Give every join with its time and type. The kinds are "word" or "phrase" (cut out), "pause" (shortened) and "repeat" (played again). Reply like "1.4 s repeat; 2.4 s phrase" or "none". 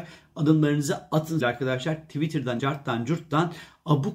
1.4 s word; 2.6 s word